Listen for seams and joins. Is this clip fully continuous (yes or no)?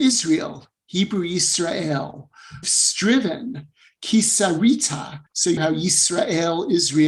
no